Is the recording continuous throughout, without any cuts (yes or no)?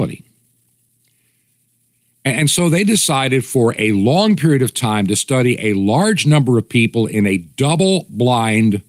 yes